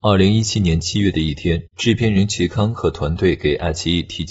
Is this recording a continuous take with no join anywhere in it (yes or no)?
no